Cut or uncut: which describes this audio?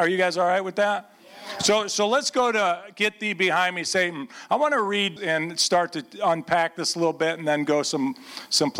cut